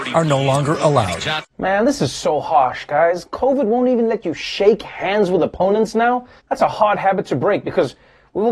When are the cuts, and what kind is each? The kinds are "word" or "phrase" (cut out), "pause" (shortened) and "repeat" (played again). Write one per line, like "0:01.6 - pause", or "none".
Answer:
0:01.5 - pause
0:06.4 - pause